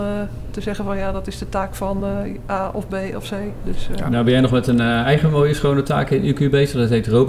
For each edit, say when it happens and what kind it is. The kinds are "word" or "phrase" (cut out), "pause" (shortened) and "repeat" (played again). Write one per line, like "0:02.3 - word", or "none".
none